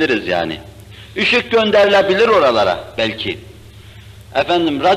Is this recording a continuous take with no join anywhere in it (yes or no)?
yes